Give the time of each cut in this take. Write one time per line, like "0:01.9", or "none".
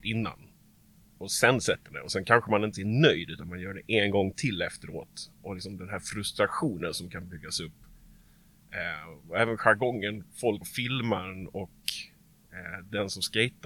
0:01.9
0:02.7
0:10.6

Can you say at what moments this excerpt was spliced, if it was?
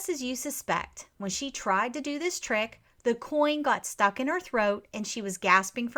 none

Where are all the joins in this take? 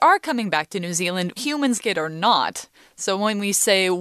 0:01.4
0:01.8

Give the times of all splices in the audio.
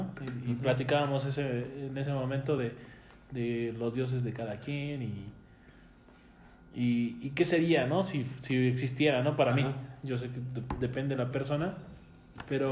none

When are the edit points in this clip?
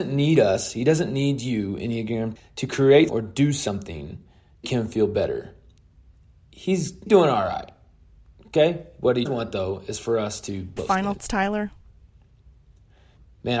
0:02.4
0:03.1
0:04.6
0:07.1
0:09.3
0:10.8
0:11.2

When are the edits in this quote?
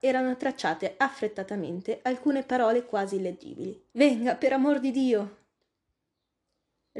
0:03.9

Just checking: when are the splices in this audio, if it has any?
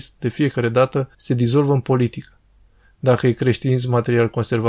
0:01.1

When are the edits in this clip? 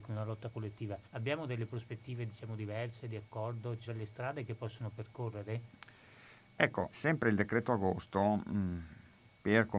0:01.0
0:03.9
0:06.9

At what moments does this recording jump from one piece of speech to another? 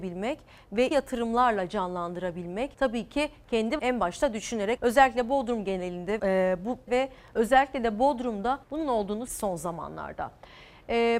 0:00.9
0:02.7
0:03.8
0:04.8
0:06.2
0:06.9
0:08.6
0:09.3

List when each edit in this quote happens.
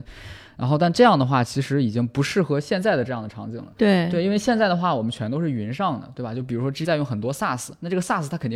0:06.8

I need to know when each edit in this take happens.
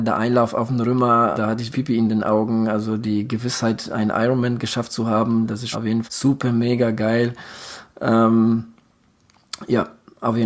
0:01.3
0:01.7
0:05.7
0:06.0

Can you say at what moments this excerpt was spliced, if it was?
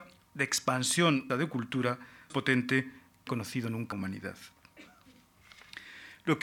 0:01.3
0:02.3
0:03.3
0:03.9

